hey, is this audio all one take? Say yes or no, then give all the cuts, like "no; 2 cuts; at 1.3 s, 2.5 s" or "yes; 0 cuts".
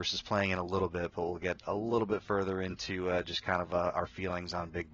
yes; 0 cuts